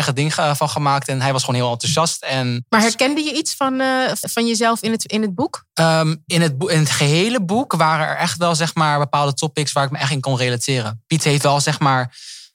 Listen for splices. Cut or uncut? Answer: cut